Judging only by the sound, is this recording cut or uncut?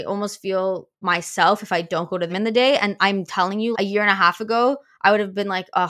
cut